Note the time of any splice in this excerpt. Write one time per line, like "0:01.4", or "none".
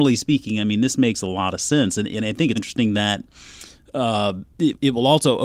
0:02.5
0:04.5